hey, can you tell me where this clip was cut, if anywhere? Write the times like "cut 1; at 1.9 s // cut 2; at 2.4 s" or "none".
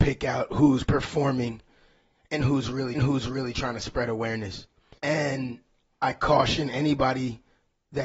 cut 1; at 2.9 s // cut 2; at 5.0 s